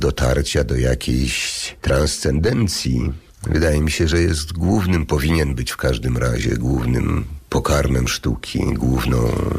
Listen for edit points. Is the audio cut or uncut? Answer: uncut